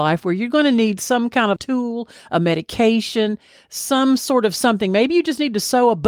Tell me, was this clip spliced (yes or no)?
yes